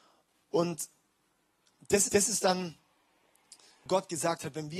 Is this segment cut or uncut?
cut